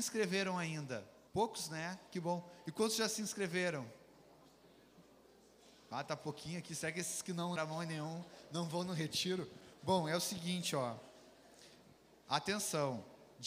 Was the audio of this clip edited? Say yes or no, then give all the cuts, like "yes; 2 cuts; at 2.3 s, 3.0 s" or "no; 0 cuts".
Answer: yes; 2 cuts; at 1.3 s, 7.6 s